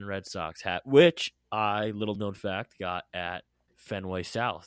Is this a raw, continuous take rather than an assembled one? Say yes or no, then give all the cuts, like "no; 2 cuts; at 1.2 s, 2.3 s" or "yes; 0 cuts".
yes; 0 cuts